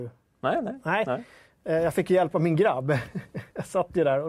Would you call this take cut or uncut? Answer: uncut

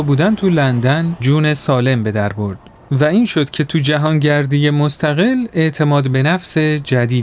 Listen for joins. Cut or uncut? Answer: uncut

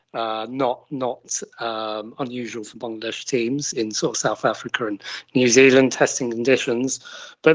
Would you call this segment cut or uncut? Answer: uncut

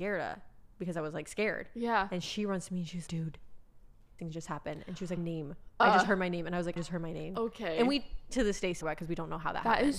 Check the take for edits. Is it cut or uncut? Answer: cut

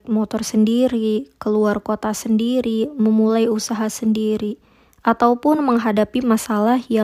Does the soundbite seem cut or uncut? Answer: uncut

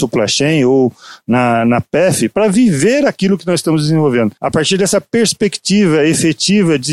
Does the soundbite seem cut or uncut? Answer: cut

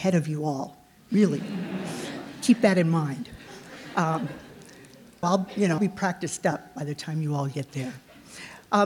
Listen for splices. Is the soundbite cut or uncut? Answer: cut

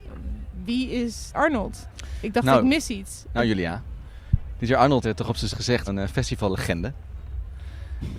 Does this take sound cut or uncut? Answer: cut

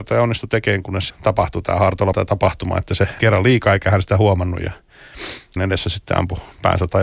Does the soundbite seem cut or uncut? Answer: cut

